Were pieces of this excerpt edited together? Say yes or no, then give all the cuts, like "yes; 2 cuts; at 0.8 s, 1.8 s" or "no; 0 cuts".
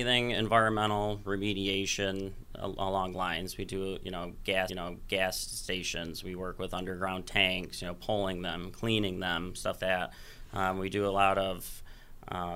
yes; 3 cuts; at 3.1 s, 4.7 s, 9.8 s